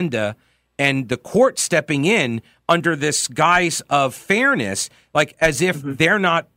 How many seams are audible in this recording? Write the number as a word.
zero